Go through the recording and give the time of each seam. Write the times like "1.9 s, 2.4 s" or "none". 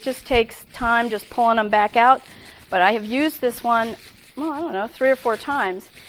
none